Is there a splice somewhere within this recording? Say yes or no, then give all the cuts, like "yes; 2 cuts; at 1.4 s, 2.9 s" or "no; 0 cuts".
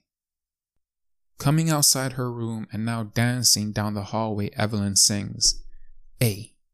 no; 0 cuts